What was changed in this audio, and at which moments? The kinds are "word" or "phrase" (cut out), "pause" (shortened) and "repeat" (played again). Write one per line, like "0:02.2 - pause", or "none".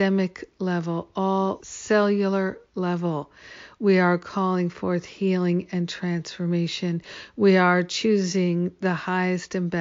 0:01.6 - word